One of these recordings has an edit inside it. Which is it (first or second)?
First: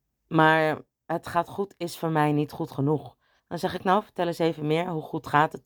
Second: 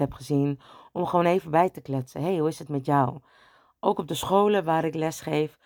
first